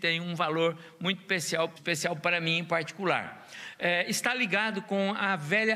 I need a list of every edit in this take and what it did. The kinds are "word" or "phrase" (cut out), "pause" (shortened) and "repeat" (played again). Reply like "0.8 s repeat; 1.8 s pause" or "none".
1.8 s word